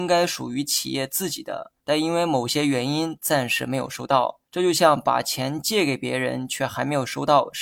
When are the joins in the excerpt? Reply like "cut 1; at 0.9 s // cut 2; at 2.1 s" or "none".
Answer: cut 1; at 1.8 s // cut 2; at 4.5 s